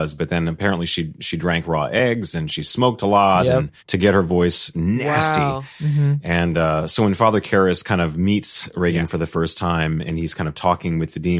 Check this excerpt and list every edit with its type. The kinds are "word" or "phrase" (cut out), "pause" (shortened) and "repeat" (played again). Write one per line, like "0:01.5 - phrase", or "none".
0:03.8 - pause
0:04.7 - word